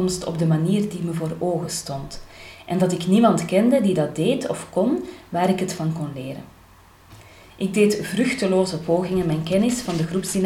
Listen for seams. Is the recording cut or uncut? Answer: uncut